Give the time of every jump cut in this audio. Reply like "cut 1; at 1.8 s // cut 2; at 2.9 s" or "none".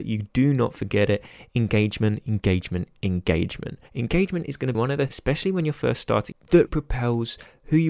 cut 1; at 3.9 s // cut 2; at 4.7 s // cut 3; at 5.1 s // cut 4; at 6.3 s // cut 5; at 6.7 s